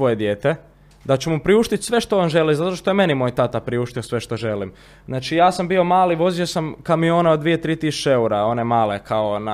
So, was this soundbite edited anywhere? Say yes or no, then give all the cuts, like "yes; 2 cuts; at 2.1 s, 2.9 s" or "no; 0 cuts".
no; 0 cuts